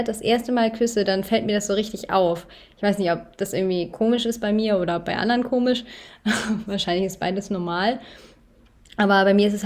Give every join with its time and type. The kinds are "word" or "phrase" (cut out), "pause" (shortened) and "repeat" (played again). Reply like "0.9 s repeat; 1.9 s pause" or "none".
none